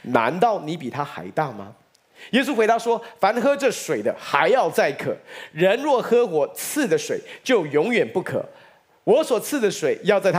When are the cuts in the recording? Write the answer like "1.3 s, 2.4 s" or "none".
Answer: none